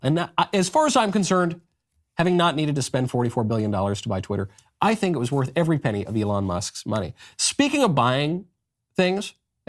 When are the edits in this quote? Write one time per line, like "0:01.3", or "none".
none